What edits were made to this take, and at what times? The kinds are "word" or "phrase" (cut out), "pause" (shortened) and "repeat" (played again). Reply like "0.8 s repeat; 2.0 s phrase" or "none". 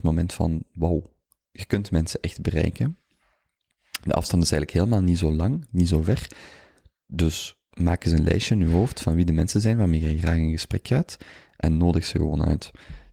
none